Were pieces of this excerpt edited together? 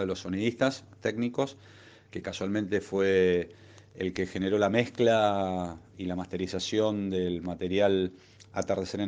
no; 0 cuts

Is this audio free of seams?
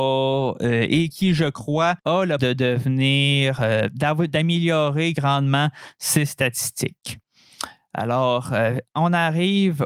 no; 2 cuts; at 2.0 s, 2.4 s

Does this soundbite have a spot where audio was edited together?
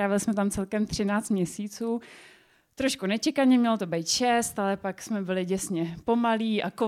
no; 0 cuts

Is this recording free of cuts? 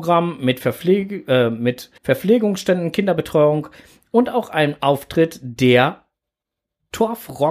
no; 1 cut; at 2.0 s

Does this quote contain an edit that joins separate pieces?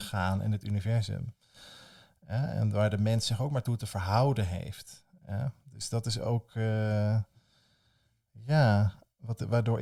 no; 0 cuts

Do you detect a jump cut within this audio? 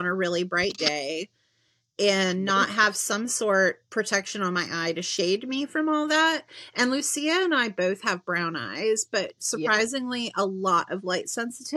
yes; 1 cut; at 3.9 s

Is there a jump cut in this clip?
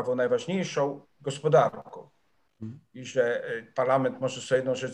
yes; 1 cut; at 1.0 s

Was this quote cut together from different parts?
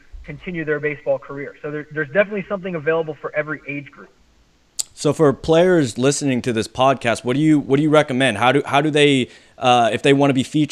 yes; 1 cut; at 6.0 s

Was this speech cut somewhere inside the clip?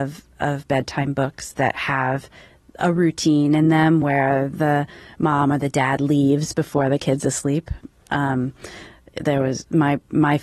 no; 0 cuts

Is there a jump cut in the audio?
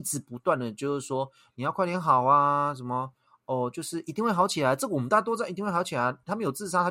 no; 0 cuts

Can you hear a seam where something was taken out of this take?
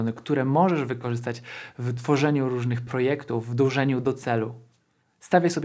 no; 0 cuts

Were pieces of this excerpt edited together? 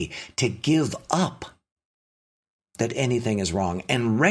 no; 0 cuts

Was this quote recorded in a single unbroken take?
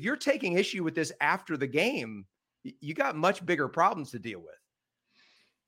yes; 0 cuts

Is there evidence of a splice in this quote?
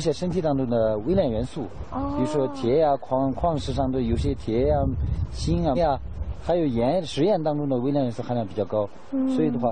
yes; 1 cut; at 5.7 s

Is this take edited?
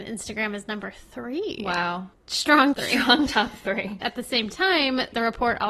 yes; 2 cuts; at 2.7 s, 4.0 s

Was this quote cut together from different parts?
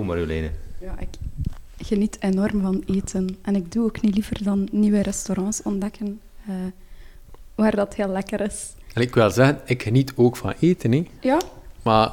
no; 0 cuts

